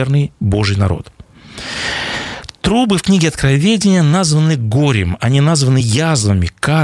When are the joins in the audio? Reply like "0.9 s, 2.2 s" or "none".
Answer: none